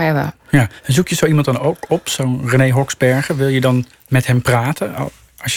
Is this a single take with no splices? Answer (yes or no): yes